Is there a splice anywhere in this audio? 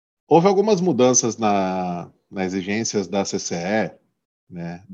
no; 0 cuts

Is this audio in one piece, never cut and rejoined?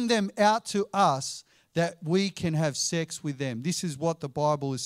yes; 0 cuts

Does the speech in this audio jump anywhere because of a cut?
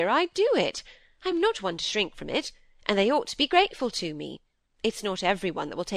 no; 0 cuts

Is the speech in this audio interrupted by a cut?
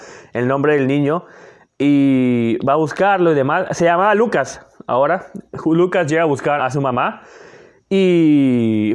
yes; 1 cut; at 6.6 s

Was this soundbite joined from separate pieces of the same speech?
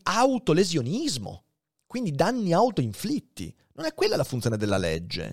no; 0 cuts

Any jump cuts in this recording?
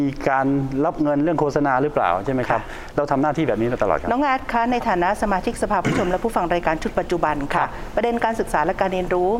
no; 0 cuts

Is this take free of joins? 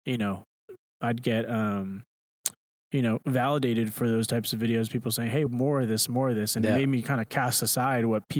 yes; 0 cuts

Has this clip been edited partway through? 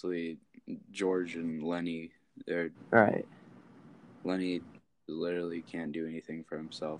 no; 0 cuts

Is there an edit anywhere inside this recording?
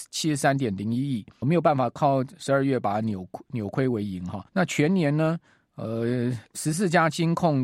yes; 3 cuts; at 1.4 s, 4.5 s, 6.5 s

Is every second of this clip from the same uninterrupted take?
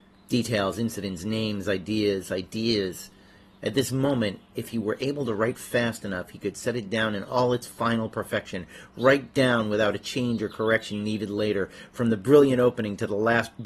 yes; 0 cuts

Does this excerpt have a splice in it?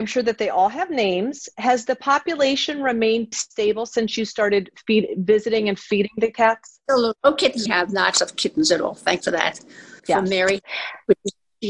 yes; 6 cuts; at 3.3 s, 7.2 s, 7.7 s, 8.1 s, 9.2 s, 10.0 s

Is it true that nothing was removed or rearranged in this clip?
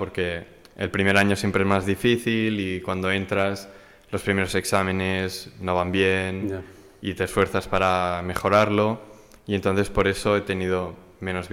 yes; 0 cuts

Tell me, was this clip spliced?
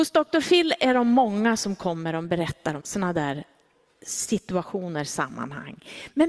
yes; 1 cut; at 2.8 s

